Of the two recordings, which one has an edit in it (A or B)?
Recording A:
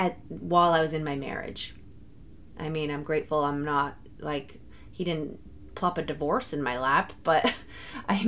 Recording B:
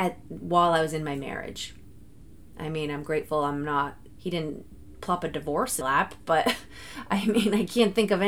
B